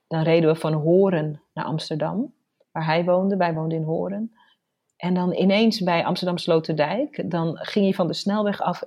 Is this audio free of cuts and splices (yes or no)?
yes